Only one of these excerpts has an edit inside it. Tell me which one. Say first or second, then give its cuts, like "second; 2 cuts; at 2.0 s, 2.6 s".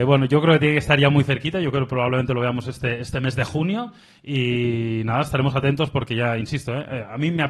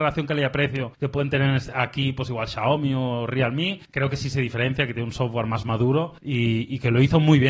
second; 3 cuts; at 0.9 s, 3.8 s, 6.2 s